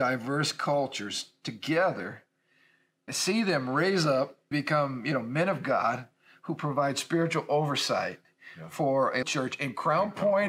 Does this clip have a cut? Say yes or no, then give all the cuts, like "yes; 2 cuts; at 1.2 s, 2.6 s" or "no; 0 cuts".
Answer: yes; 3 cuts; at 3.1 s, 4.5 s, 9.2 s